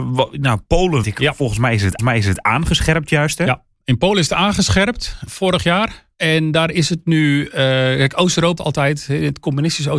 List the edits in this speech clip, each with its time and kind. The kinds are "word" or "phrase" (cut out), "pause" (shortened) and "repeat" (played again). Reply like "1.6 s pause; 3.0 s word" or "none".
1.0 s word; 2.0 s repeat; 3.7 s pause; 5.3 s word; 6.1 s pause; 8.6 s word